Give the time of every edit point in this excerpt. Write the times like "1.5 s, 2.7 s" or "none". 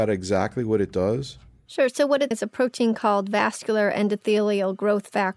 2.3 s